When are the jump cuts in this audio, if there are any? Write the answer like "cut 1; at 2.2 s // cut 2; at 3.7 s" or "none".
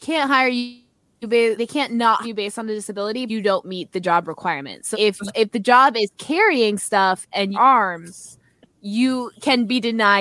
cut 1; at 1.6 s // cut 2; at 2.2 s // cut 3; at 3.3 s // cut 4; at 4.9 s // cut 5; at 5.3 s // cut 6; at 7.5 s